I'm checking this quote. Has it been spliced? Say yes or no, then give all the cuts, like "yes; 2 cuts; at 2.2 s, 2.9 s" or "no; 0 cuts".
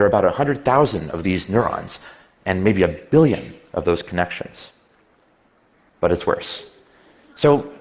no; 0 cuts